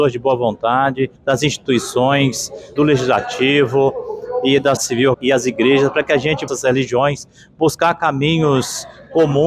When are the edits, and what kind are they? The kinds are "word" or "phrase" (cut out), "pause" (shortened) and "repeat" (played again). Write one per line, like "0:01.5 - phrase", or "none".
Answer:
0:01.2 - pause
0:02.8 - phrase
0:04.8 - word
0:05.1 - word
0:06.5 - word